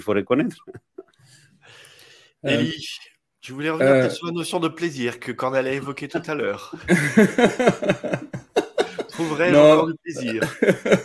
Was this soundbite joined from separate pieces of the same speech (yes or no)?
no